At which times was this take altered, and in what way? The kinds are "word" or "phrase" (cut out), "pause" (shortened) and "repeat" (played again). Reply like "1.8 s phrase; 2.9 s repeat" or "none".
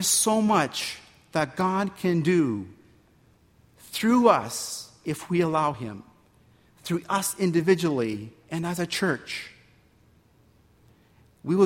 none